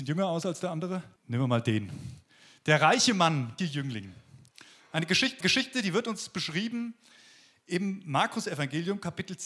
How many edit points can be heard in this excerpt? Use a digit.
3